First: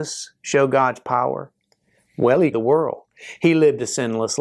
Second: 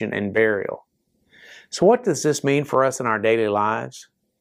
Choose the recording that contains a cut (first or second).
first